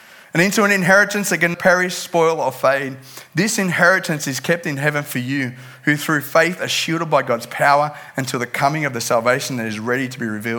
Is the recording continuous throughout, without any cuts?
no; 1 cut; at 1.5 s

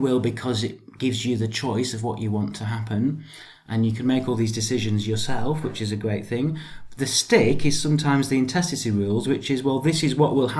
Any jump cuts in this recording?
no; 0 cuts

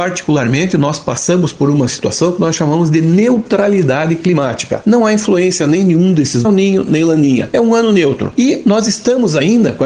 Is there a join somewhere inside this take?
yes; 1 cut; at 6.4 s

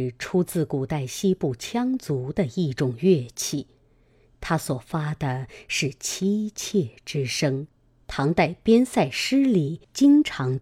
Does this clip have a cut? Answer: no; 0 cuts

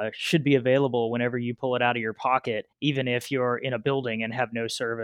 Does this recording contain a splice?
yes; 1 cut; at 2.7 s

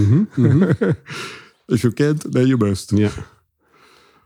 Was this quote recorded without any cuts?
yes; 0 cuts

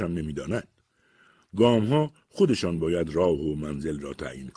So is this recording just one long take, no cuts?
yes; 0 cuts

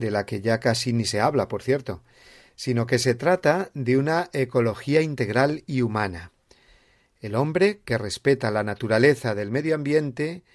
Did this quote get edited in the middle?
no; 0 cuts

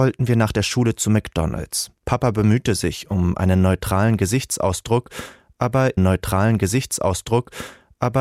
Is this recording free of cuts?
no; 2 cuts; at 2.0 s, 6.0 s

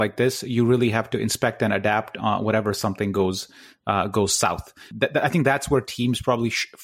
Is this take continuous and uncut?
yes; 0 cuts

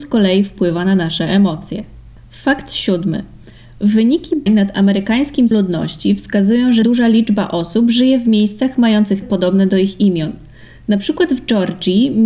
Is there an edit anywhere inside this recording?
yes; 4 cuts; at 4.5 s, 5.5 s, 6.8 s, 9.2 s

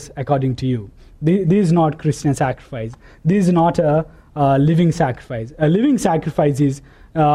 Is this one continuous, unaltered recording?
yes; 0 cuts

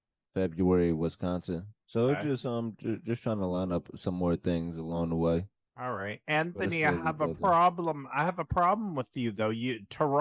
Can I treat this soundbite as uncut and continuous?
yes; 0 cuts

